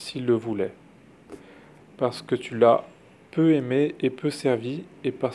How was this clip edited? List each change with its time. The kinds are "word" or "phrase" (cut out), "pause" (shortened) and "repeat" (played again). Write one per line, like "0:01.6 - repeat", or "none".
none